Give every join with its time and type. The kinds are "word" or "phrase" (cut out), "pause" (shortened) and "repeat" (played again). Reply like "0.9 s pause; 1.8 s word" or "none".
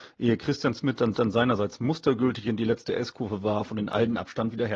1.1 s repeat